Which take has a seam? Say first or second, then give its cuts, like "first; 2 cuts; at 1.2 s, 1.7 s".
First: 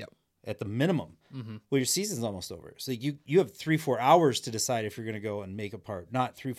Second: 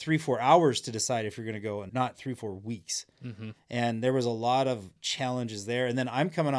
second; 2 cuts; at 1.9 s, 5.0 s